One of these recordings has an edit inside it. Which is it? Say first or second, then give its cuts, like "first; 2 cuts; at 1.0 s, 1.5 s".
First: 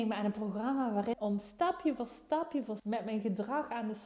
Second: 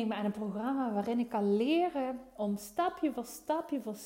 first; 2 cuts; at 1.1 s, 2.8 s